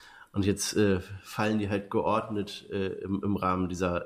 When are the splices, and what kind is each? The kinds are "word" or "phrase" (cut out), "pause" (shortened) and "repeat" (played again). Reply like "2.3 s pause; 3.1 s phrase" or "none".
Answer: none